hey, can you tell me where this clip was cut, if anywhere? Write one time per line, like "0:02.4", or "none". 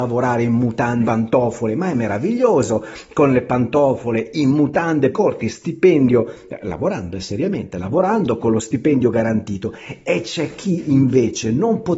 0:01.0
0:05.1